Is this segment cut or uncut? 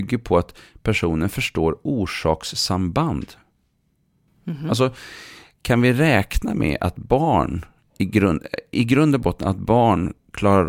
uncut